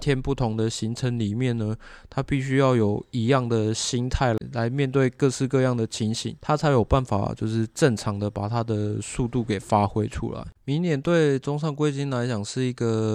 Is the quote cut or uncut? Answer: cut